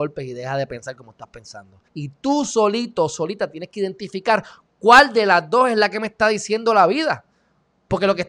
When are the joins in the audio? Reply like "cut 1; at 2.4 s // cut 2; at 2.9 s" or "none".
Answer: cut 1; at 1.9 s